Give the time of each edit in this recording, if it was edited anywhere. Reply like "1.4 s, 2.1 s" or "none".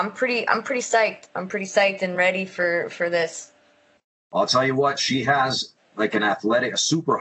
none